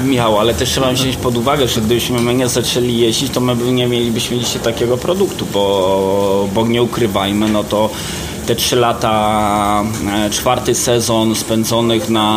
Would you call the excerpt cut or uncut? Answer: uncut